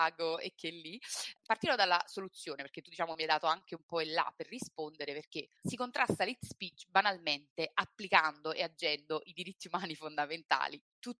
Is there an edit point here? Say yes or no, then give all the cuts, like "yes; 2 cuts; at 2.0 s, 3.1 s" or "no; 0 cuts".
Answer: yes; 2 cuts; at 1.4 s, 5.6 s